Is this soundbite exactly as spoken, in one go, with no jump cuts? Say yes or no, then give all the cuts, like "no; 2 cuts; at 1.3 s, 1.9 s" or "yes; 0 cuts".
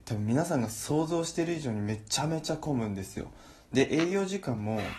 yes; 0 cuts